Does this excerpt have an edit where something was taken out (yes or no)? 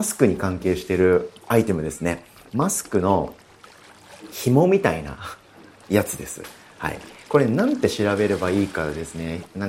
no